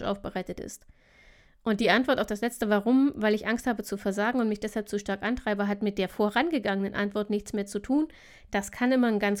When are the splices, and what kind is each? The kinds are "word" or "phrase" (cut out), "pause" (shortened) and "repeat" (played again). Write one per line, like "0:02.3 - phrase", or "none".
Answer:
none